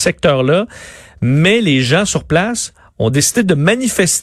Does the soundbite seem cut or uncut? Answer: uncut